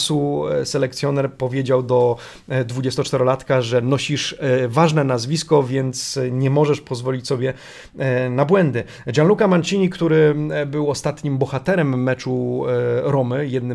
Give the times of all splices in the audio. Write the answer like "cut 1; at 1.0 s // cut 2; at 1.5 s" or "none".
none